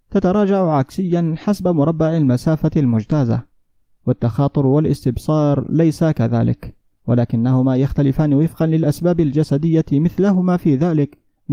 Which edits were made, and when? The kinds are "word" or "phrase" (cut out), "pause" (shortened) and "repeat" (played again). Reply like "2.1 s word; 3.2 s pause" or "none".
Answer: none